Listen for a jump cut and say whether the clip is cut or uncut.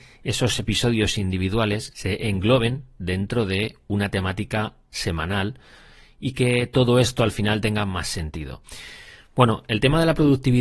uncut